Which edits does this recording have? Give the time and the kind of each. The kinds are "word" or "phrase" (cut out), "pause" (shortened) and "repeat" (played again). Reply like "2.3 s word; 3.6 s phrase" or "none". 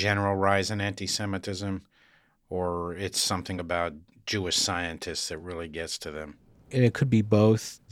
none

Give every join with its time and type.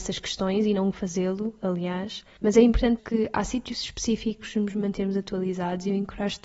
0.9 s word; 2.4 s pause; 3.0 s phrase; 4.5 s phrase

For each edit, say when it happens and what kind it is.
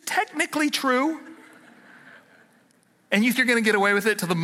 3.3 s word

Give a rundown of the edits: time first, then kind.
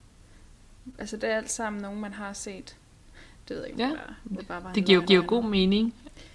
4.4 s word; 5.0 s repeat

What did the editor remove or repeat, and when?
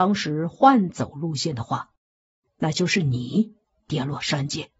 none

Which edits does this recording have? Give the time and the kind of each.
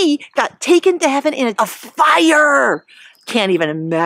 1.6 s word

